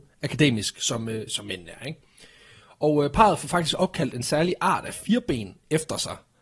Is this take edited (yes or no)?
no